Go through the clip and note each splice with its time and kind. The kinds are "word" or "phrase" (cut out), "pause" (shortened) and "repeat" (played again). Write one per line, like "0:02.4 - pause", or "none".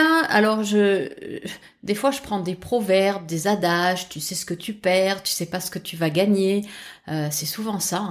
none